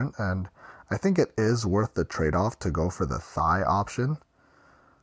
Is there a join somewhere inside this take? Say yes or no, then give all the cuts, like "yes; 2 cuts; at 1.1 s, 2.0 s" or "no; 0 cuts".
no; 0 cuts